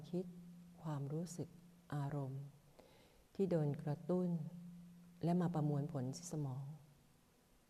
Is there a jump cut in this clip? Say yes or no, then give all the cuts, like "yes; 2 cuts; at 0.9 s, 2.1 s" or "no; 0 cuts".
no; 0 cuts